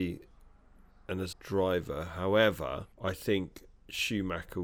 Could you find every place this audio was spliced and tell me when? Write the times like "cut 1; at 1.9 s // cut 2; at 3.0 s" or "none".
cut 1; at 1.3 s // cut 2; at 2.9 s